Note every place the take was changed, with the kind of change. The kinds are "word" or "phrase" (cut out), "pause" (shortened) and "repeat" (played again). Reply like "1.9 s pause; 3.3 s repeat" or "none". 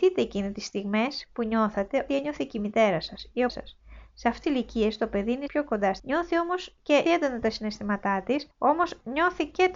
2.1 s word; 3.5 s word; 4.4 s word; 5.5 s word; 6.0 s word; 7.1 s word; 8.5 s pause